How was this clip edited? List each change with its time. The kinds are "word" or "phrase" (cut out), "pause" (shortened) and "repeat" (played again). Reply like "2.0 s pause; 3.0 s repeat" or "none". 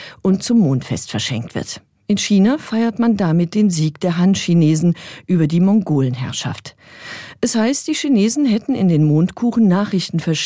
none